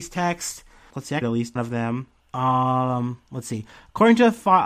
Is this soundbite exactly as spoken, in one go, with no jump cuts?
no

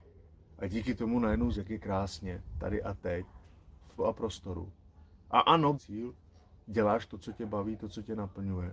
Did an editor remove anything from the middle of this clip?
yes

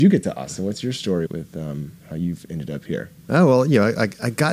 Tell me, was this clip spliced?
yes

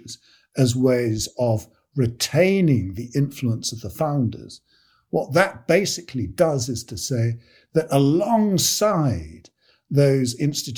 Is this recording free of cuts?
yes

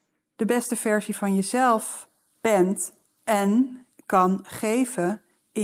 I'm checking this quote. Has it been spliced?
no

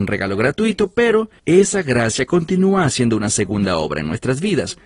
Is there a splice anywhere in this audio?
yes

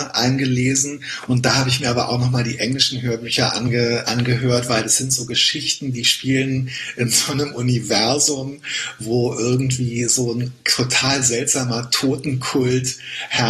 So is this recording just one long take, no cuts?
no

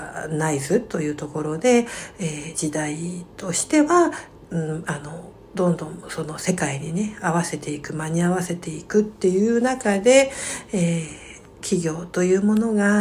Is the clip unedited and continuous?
yes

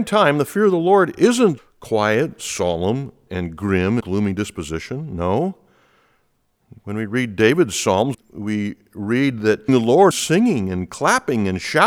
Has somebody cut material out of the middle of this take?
yes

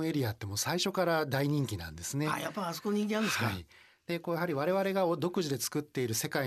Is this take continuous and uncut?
yes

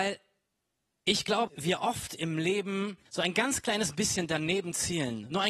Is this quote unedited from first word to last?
no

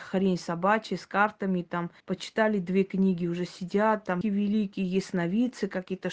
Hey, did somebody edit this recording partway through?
yes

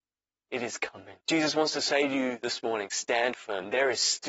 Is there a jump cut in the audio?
yes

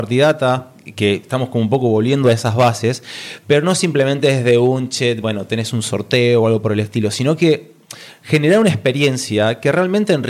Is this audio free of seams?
yes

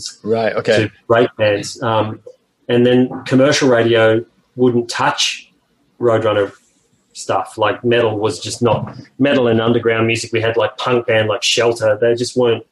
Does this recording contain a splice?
no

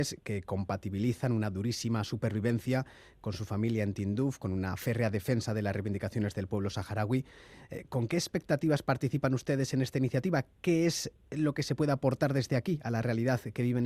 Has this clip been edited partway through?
no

